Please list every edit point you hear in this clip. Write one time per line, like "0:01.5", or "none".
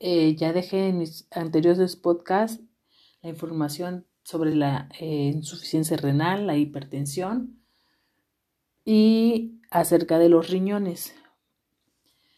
none